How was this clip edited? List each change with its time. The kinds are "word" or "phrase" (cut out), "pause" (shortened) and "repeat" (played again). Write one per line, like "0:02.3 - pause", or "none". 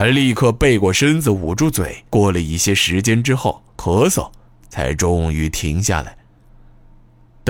0:02.1 - pause
0:03.7 - pause
0:04.5 - pause